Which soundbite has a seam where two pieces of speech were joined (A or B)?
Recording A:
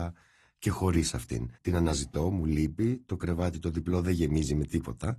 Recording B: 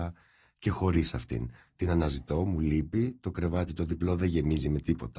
A